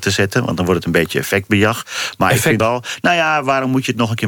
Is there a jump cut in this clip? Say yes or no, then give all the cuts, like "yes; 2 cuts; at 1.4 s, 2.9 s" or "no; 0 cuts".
yes; 1 cut; at 2.6 s